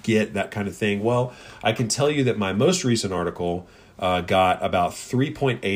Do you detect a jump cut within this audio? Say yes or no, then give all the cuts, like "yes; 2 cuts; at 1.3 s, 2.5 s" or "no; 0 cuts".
no; 0 cuts